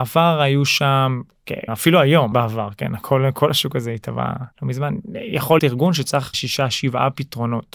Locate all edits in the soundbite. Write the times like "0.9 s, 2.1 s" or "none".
1.7 s, 2.3 s, 4.5 s, 5.6 s, 6.3 s